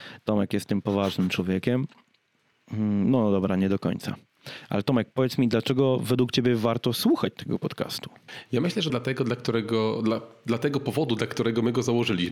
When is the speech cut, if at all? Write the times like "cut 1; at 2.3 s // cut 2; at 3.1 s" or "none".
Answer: cut 1; at 8.9 s

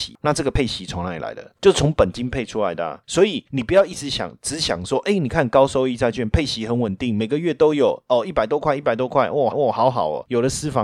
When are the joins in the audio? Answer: cut 1; at 9.5 s

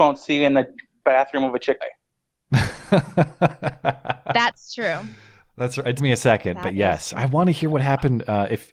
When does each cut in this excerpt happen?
cut 1; at 1.8 s // cut 2; at 6.0 s // cut 3; at 7.1 s

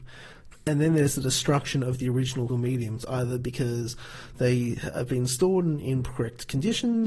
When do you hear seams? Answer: cut 1; at 2.5 s

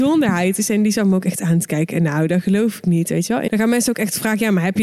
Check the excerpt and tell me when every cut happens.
cut 1; at 3.5 s

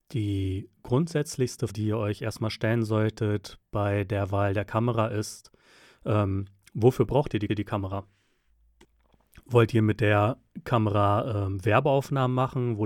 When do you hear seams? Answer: cut 1; at 1.7 s // cut 2; at 7.5 s

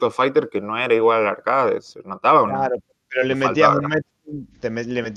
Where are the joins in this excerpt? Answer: none

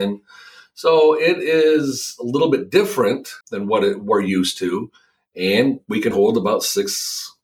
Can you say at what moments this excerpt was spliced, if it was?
cut 1; at 3.4 s // cut 2; at 6.1 s

